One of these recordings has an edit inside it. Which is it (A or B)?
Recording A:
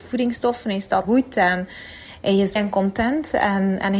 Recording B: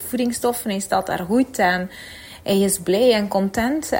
A